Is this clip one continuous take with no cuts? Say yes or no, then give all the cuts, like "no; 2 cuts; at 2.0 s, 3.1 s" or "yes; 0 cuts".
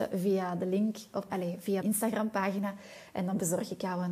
no; 2 cuts; at 1.3 s, 1.8 s